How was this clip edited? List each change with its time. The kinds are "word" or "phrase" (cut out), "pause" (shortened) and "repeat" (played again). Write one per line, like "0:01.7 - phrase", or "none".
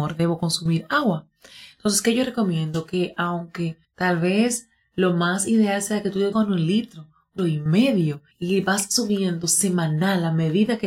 0:03.8 - pause
0:06.3 - phrase
0:07.4 - word
0:08.3 - pause